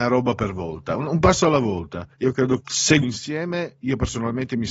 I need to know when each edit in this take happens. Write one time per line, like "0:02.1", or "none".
0:02.1
0:02.6
0:03.0